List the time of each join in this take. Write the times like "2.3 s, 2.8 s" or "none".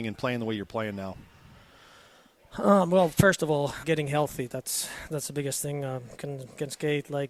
3.8 s, 6.2 s